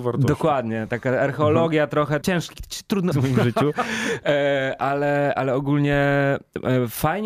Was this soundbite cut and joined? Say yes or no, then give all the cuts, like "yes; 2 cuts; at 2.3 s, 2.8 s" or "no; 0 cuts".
yes; 3 cuts; at 2.2 s, 3.1 s, 5.4 s